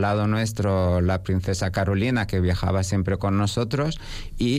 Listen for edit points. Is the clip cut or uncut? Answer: uncut